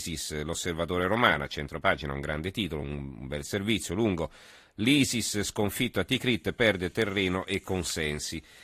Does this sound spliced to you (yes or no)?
no